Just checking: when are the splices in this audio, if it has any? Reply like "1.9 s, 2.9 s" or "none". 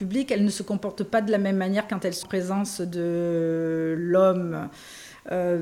2.2 s